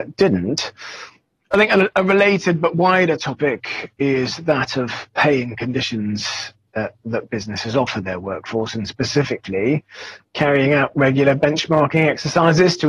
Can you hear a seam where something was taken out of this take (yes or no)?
yes